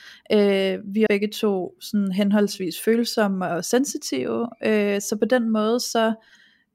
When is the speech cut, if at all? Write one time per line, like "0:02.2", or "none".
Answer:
0:01.1